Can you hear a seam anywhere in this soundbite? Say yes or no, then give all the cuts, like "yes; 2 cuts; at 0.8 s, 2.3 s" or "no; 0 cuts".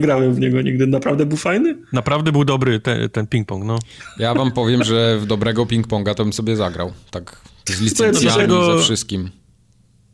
no; 0 cuts